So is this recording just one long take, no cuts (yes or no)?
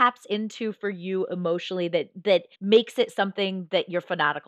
no